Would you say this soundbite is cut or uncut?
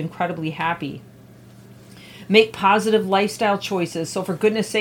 uncut